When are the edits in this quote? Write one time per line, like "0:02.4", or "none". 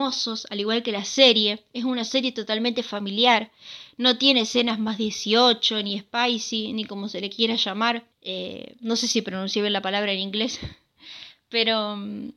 0:08.1